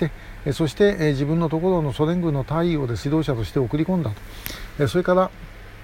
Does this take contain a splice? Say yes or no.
yes